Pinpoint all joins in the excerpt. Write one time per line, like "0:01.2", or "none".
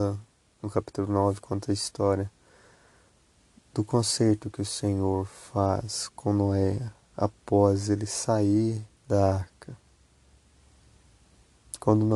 0:09.0